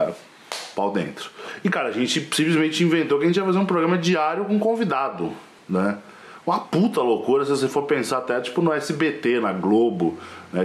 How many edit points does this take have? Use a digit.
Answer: 0